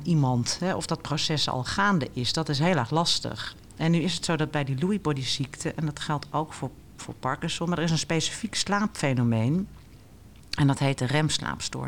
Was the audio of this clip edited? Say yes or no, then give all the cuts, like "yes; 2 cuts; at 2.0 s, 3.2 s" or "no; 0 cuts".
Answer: no; 0 cuts